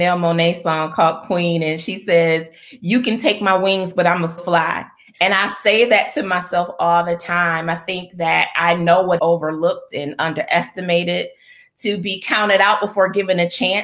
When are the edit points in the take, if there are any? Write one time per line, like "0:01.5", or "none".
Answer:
0:04.4
0:09.2